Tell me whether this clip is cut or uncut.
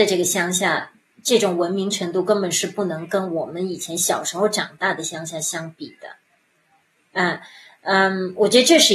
uncut